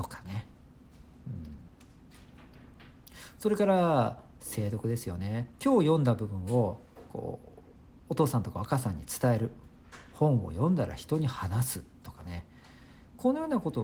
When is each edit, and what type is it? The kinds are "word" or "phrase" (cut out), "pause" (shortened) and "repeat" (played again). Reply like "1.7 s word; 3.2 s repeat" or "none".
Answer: none